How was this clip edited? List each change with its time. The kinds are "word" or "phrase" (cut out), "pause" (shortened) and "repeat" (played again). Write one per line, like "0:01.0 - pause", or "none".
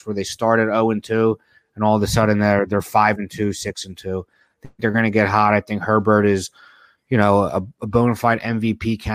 none

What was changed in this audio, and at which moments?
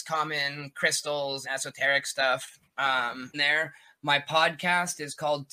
0:01.4 - word
0:03.3 - word

